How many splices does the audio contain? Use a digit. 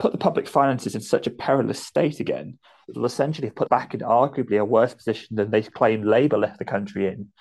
2